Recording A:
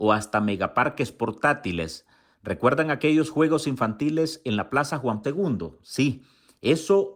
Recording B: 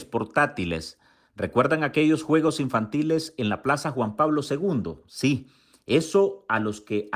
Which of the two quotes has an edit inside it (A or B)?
A